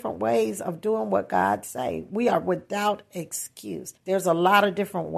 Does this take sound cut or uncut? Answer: cut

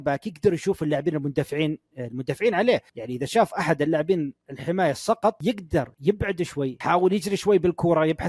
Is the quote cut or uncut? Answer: cut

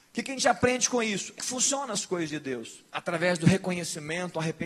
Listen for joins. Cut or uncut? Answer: cut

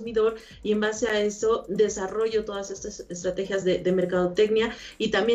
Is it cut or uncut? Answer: uncut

